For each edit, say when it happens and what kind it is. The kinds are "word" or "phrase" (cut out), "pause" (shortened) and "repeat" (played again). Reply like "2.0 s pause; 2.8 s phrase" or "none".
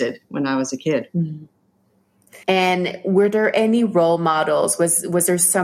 2.4 s pause